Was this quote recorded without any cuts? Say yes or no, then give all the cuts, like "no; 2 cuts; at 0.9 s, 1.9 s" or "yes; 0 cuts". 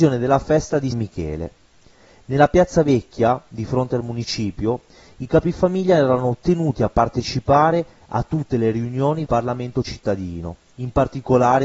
no; 2 cuts; at 0.9 s, 9.3 s